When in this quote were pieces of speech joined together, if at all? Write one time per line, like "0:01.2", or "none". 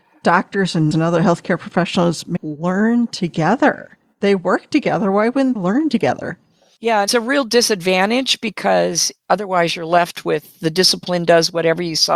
0:00.9
0:02.4
0:05.6
0:07.1